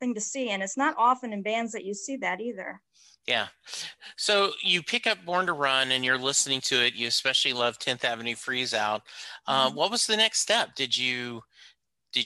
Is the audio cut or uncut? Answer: uncut